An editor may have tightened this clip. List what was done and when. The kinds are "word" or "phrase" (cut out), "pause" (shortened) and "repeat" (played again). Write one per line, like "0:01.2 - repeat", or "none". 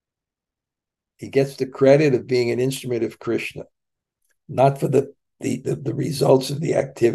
none